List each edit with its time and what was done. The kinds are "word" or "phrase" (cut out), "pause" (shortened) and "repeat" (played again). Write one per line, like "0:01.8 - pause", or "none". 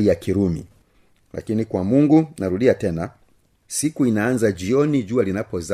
none